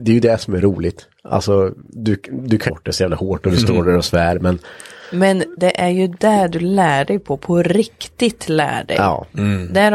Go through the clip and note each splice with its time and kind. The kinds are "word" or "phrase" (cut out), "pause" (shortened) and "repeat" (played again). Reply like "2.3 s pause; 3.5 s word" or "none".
2.7 s phrase